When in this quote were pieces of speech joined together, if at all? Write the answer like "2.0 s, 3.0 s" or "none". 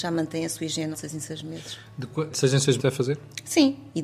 0.9 s, 2.3 s, 2.8 s

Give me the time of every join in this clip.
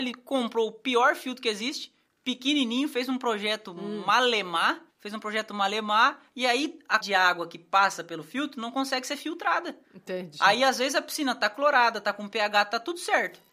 4.9 s, 7.0 s, 9.8 s

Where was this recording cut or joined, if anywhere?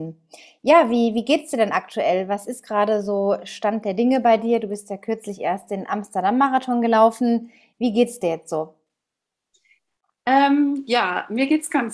none

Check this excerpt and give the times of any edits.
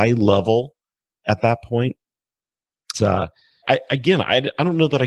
2.9 s, 3.6 s

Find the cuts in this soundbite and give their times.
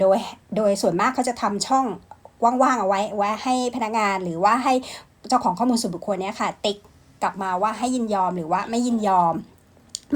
none

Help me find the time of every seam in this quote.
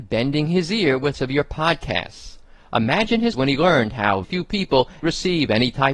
1.1 s, 3.3 s, 4.2 s, 5.0 s

